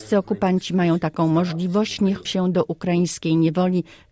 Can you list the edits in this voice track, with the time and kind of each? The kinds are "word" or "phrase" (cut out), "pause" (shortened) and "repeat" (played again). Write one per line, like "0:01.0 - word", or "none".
0:02.2 - word